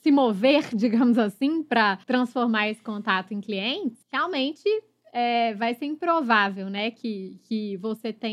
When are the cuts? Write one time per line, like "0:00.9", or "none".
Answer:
0:02.0
0:04.0